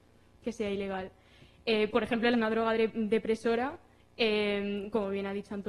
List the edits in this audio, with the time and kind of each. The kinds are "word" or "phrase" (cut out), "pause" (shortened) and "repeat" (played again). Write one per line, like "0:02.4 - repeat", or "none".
0:02.3 - phrase